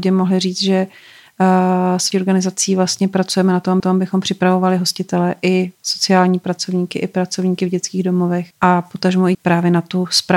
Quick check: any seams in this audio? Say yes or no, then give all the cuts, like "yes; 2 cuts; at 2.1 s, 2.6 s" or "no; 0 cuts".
yes; 5 cuts; at 2.1 s, 3.8 s, 5.7 s, 8.5 s, 9.3 s